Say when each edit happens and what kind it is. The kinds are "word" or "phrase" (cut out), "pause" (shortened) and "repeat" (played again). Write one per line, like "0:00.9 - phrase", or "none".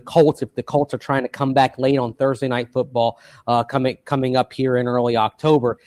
none